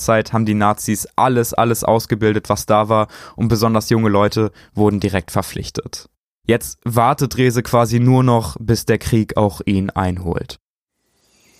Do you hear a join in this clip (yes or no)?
no